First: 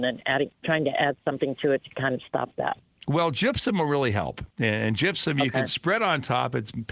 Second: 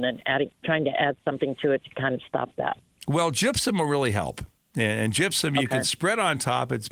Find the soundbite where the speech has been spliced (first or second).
first